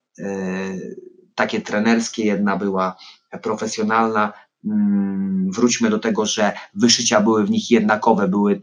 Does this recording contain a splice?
no; 0 cuts

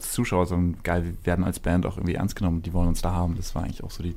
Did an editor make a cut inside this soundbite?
no; 0 cuts

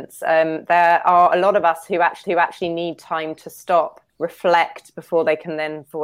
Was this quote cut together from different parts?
yes; 2 cuts; at 2.2 s, 4.1 s

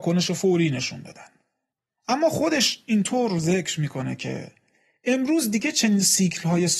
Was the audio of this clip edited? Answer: no; 0 cuts

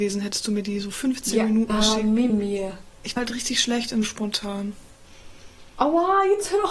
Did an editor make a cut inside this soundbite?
yes; 3 cuts; at 1.7 s, 2.3 s, 3.2 s

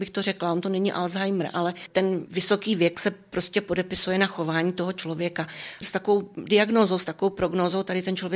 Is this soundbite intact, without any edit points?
yes; 0 cuts

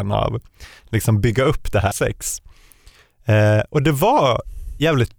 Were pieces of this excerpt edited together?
yes; 1 cut; at 1.9 s

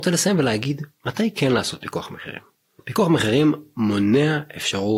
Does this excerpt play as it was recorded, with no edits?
yes; 0 cuts

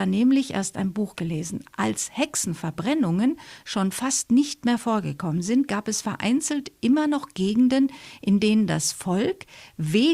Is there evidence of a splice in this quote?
no; 0 cuts

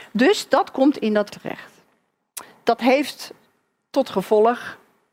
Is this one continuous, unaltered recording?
no; 1 cut; at 1.3 s

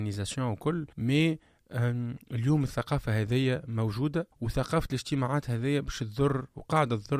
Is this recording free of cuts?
no; 2 cuts; at 0.9 s, 4.3 s

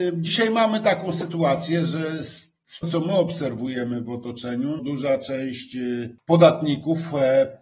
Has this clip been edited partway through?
yes; 2 cuts; at 2.8 s, 4.8 s

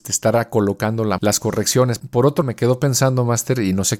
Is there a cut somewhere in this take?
yes; 3 cuts; at 1.2 s, 2.0 s, 2.4 s

